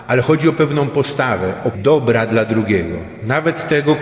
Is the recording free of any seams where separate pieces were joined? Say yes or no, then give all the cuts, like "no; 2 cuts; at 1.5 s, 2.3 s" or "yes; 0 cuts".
no; 1 cut; at 1.7 s